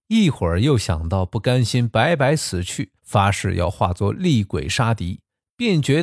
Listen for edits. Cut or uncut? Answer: cut